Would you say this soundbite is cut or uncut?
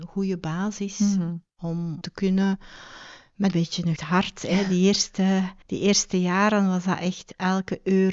cut